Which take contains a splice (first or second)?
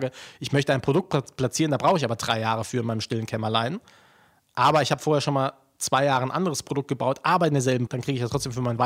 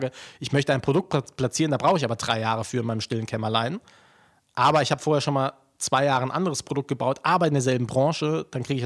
first